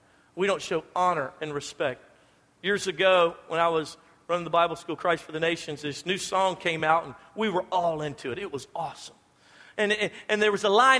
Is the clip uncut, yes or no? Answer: yes